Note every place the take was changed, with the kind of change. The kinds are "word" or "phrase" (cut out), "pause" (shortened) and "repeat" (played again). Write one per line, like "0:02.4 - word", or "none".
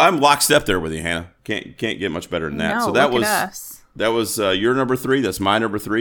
0:01.4 - pause